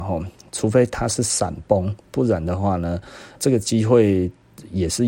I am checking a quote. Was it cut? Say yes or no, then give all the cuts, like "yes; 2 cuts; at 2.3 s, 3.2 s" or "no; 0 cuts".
yes; 1 cut; at 3.4 s